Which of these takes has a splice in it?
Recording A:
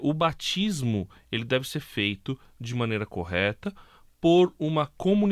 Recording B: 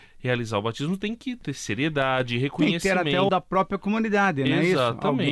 B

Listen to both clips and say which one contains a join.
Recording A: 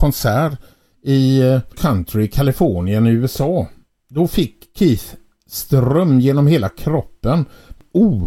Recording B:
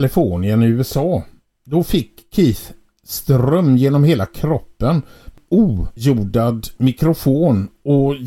A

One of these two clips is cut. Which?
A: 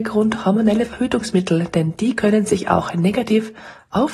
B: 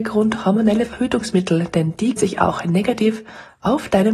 B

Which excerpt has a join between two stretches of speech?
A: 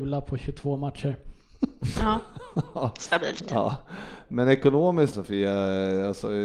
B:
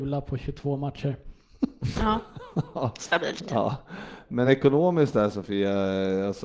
A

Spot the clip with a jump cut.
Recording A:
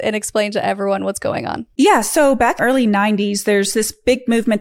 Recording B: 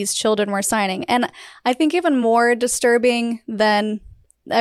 A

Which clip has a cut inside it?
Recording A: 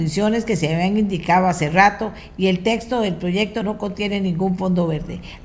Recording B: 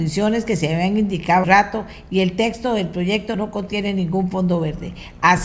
B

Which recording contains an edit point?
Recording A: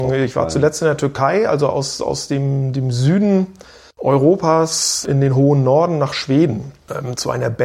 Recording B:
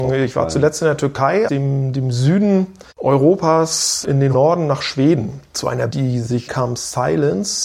B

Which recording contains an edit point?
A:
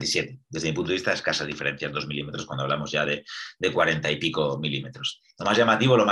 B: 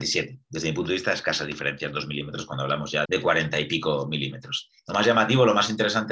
B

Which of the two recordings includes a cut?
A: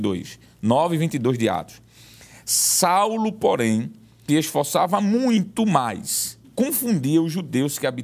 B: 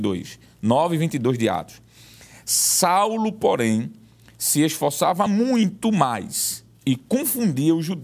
A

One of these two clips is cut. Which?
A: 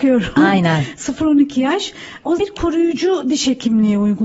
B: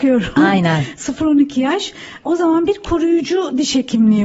A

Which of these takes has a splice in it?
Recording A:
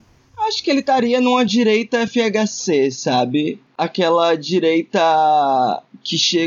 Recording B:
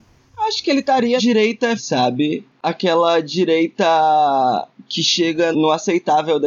B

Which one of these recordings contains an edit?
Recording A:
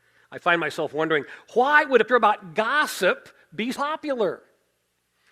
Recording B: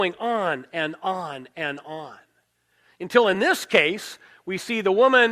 A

